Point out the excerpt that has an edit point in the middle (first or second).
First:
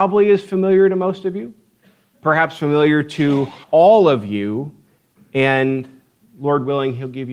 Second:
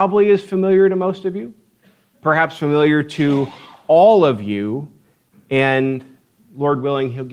first